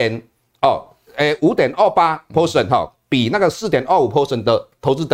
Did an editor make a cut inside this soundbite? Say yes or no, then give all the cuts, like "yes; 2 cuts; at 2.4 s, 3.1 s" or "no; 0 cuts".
no; 0 cuts